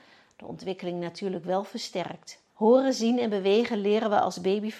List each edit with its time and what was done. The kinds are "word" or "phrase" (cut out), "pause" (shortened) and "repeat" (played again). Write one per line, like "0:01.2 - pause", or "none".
0:02.5 - pause